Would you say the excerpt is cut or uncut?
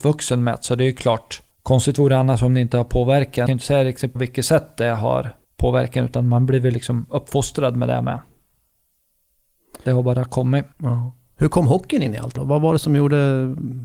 cut